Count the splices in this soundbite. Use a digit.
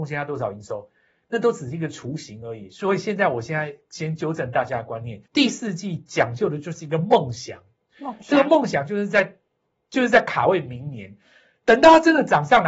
1